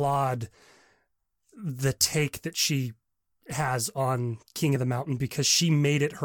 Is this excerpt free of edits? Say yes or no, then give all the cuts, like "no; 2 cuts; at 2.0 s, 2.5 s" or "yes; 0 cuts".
yes; 0 cuts